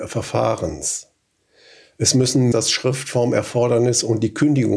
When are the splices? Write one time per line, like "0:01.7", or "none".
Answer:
0:02.5